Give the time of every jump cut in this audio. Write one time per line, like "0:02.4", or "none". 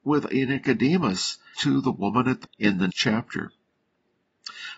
0:01.5
0:02.4
0:02.9